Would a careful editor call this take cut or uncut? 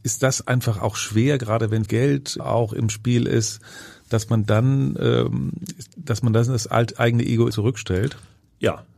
cut